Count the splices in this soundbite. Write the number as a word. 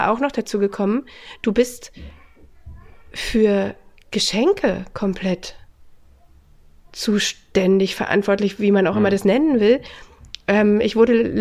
zero